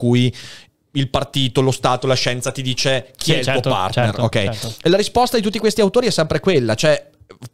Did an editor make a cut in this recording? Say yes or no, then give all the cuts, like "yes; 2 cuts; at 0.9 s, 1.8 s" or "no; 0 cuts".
no; 0 cuts